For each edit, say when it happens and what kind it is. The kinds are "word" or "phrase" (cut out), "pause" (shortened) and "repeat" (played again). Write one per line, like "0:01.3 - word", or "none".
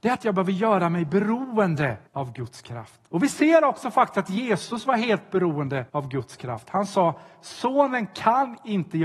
0:02.1 - pause
0:03.1 - pause
0:05.9 - pause